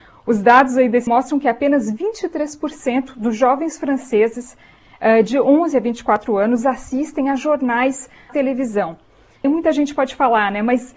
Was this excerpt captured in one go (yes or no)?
no